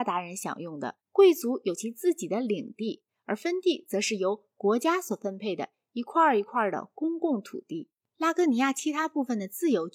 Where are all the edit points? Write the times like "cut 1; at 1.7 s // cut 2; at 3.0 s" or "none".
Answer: cut 1; at 1.0 s